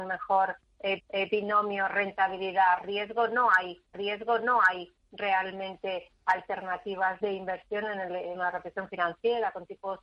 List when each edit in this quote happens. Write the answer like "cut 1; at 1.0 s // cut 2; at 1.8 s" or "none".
cut 1; at 1.0 s // cut 2; at 3.9 s // cut 3; at 7.2 s // cut 4; at 8.3 s